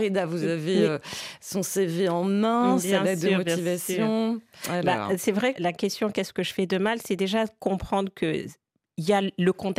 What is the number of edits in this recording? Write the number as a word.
one